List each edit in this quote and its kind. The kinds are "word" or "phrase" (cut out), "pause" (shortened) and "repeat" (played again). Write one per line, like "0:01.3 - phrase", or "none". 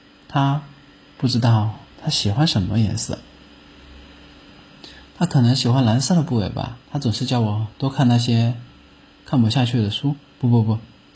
0:06.8 - pause